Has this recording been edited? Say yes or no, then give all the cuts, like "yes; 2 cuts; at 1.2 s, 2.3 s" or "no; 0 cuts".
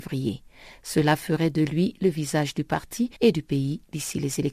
yes; 1 cut; at 3.2 s